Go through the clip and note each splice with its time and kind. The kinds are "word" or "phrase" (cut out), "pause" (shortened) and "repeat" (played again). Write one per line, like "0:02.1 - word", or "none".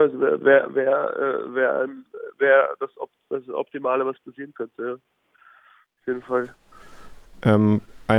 none